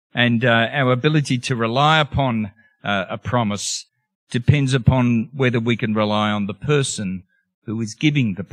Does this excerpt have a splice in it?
no; 0 cuts

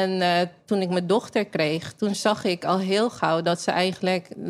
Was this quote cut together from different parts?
no; 0 cuts

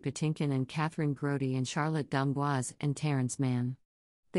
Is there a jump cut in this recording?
no; 0 cuts

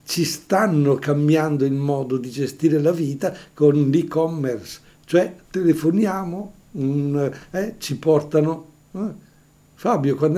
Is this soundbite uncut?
no; 1 cut; at 5.4 s

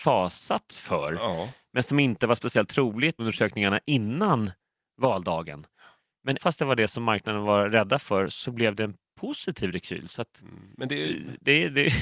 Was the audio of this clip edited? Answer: yes; 2 cuts; at 3.2 s, 6.4 s

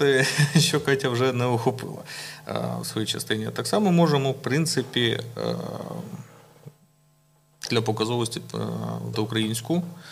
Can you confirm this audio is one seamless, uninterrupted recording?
no; 1 cut; at 9.1 s

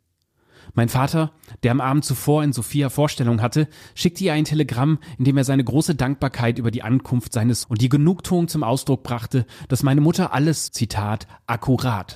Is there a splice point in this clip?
yes; 2 cuts; at 7.6 s, 10.7 s

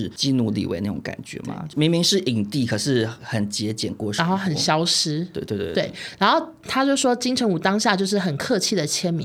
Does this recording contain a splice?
no; 0 cuts

